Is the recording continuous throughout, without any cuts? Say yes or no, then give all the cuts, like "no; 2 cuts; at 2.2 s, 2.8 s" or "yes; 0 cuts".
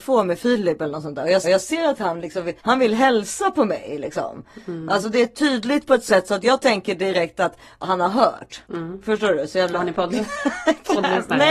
no; 4 cuts; at 1.4 s, 2.6 s, 7.8 s, 8.6 s